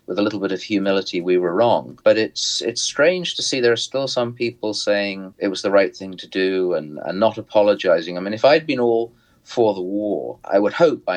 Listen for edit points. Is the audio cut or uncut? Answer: uncut